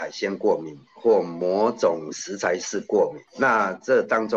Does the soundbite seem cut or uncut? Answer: cut